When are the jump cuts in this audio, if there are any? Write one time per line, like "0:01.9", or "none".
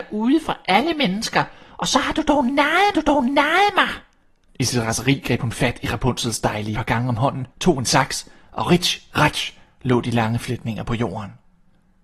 0:02.9
0:06.7
0:07.5

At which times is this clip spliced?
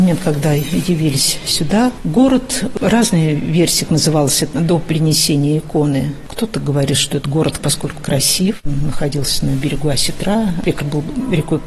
0:03.9
0:04.5
0:07.6
0:08.0
0:10.8

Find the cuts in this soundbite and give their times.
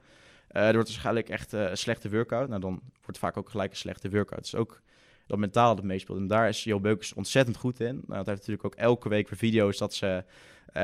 none

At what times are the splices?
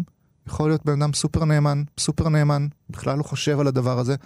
0:02.0

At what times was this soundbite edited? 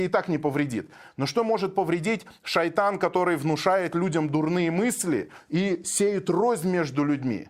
none

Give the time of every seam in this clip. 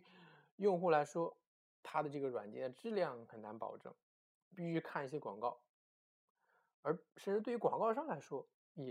0:01.6
0:04.3
0:07.1

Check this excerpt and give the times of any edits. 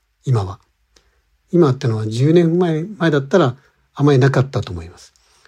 none

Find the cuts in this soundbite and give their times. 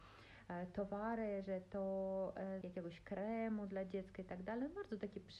0:02.6

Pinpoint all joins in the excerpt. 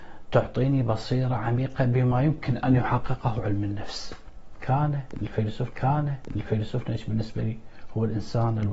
0:05.7

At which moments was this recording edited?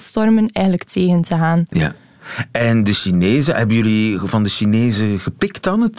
none

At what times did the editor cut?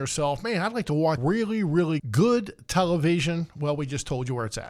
0:01.2
0:02.0

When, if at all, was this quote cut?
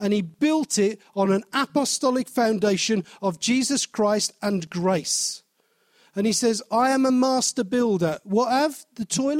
none

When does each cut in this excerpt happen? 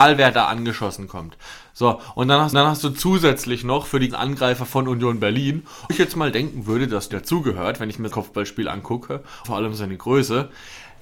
0:02.5
0:04.1
0:05.9
0:07.1
0:08.1
0:09.4

